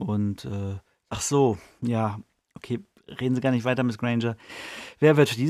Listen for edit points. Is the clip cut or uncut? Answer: cut